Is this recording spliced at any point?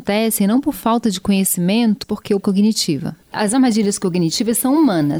yes; 2 cuts; at 2.0 s, 2.4 s

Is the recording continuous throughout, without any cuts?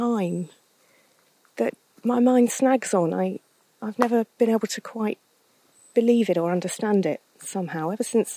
yes; 0 cuts

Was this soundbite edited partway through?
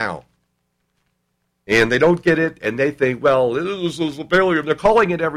no; 0 cuts

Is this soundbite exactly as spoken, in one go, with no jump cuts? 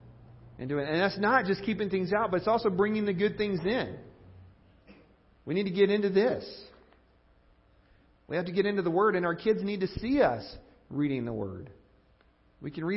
yes; 0 cuts

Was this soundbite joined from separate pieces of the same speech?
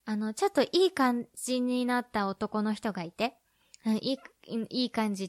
no; 0 cuts

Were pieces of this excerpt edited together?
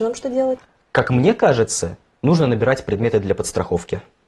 no; 0 cuts

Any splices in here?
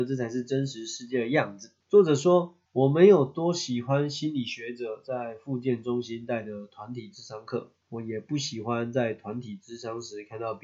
yes; 3 cuts; at 1.8 s, 2.7 s, 7.8 s

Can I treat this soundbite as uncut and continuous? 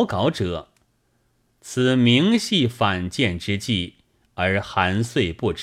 yes; 0 cuts

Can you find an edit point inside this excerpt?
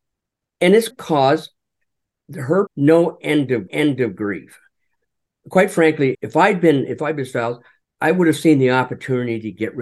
yes; 5 cuts; at 0.9 s, 2.7 s, 3.7 s, 6.1 s, 7.8 s

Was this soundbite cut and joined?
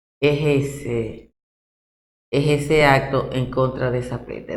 no; 0 cuts

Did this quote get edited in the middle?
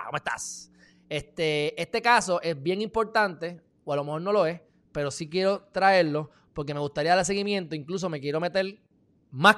no; 0 cuts

